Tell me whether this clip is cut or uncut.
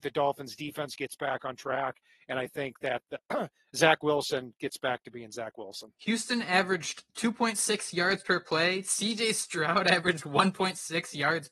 cut